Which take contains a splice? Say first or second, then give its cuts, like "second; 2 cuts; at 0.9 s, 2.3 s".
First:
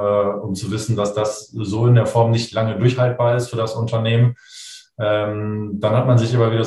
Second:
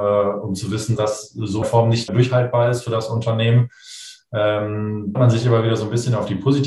second; 4 cuts; at 1.0 s, 1.6 s, 2.1 s, 5.1 s